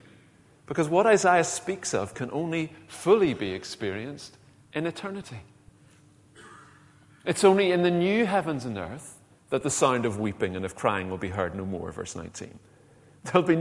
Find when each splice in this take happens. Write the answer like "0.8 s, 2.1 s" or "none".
none